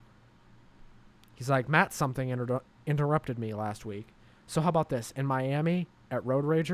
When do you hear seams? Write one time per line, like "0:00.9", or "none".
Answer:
none